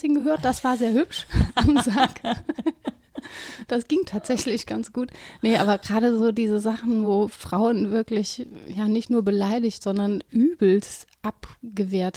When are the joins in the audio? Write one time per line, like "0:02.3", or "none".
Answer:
none